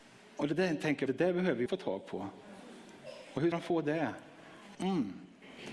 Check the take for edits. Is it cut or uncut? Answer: cut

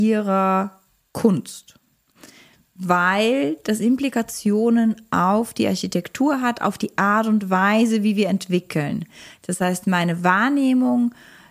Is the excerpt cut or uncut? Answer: uncut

